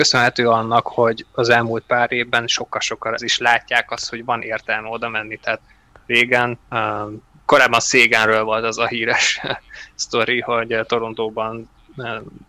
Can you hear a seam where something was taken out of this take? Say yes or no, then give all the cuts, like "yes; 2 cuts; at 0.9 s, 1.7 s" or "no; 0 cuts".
yes; 2 cuts; at 3.2 s, 6.6 s